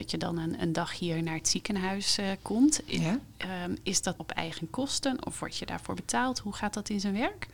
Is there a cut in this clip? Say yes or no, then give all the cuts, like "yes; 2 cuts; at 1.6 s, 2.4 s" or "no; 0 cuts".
yes; 1 cut; at 4.2 s